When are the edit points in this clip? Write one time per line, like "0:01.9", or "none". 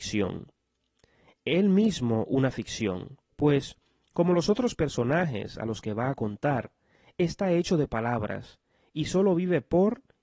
0:03.3